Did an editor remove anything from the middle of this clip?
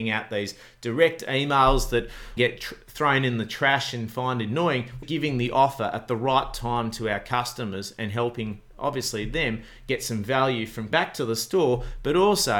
yes; 3 cuts; at 2.4 s, 5.0 s, 10.9 s

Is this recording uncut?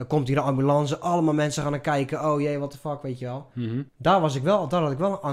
no; 1 cut; at 3.9 s

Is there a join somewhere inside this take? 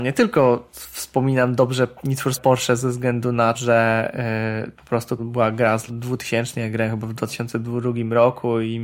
yes; 5 cuts; at 2.0 s, 2.3 s, 3.5 s, 5.2 s, 5.9 s

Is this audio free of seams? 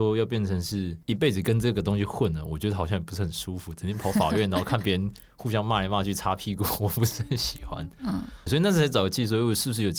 no; 1 cut; at 8.5 s

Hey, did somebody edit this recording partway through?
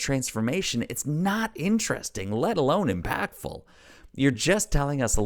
no; 0 cuts

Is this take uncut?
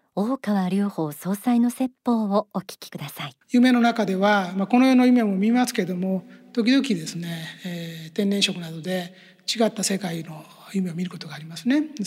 no; 1 cut; at 3.4 s

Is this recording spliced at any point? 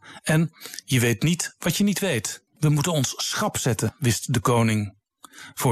yes; 1 cut; at 2.5 s

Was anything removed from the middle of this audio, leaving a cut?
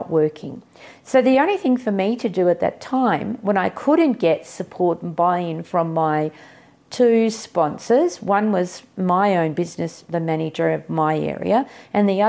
no; 0 cuts

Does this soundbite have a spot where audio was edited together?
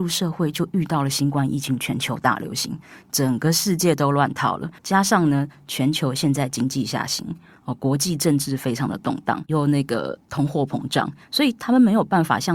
yes; 2 cuts; at 4.8 s, 11.2 s

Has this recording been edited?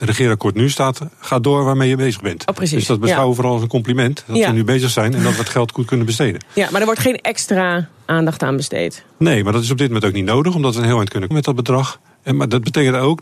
yes; 1 cut; at 11.3 s

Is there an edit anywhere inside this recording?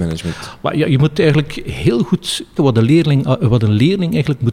yes; 1 cut; at 2.6 s

